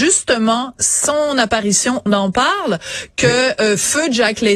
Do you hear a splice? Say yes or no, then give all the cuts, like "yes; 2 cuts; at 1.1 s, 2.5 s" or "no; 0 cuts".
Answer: yes; 1 cut; at 2.1 s